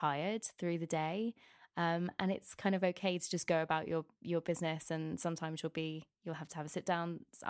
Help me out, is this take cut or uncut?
uncut